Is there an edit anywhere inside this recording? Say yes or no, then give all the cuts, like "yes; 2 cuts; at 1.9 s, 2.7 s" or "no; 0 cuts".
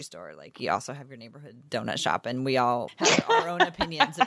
yes; 1 cut; at 2.9 s